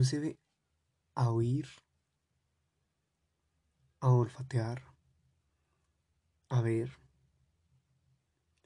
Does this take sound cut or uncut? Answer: uncut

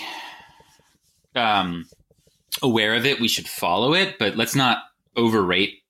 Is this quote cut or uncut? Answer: uncut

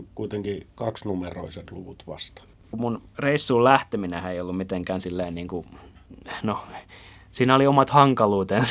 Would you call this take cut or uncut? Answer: uncut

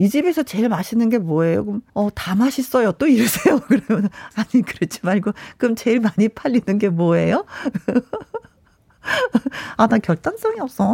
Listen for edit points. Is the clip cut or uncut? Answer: cut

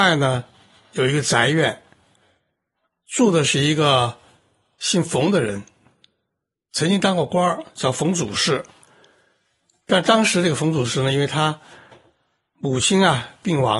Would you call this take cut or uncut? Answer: uncut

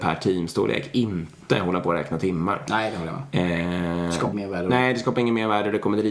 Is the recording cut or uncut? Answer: cut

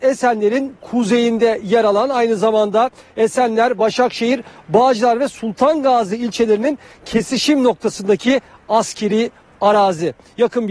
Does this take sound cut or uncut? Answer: uncut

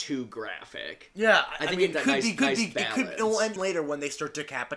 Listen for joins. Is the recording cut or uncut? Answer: cut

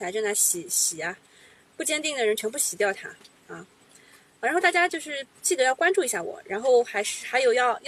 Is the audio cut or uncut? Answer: uncut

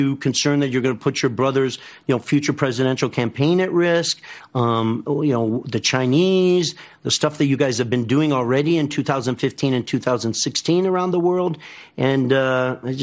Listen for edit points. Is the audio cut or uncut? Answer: uncut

